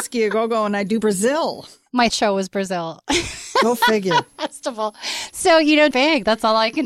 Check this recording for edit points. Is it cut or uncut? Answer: cut